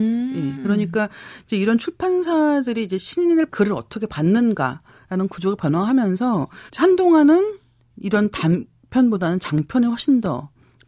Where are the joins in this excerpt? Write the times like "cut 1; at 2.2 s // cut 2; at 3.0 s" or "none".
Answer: cut 1; at 3.5 s // cut 2; at 6.7 s